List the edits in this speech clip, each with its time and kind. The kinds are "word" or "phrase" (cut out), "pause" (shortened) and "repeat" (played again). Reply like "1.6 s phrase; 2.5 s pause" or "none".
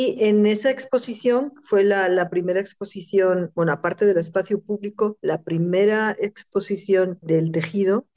none